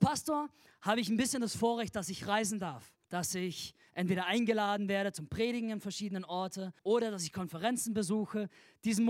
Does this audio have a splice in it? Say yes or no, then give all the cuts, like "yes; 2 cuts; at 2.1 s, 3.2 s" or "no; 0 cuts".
yes; 2 cuts; at 3.0 s, 6.8 s